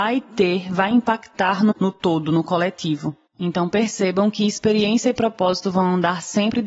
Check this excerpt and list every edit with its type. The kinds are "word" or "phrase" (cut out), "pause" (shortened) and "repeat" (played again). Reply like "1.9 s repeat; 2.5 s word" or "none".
1.7 s word; 3.3 s pause